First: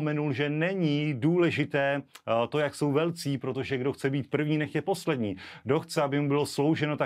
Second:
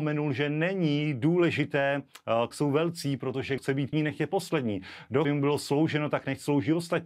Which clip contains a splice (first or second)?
second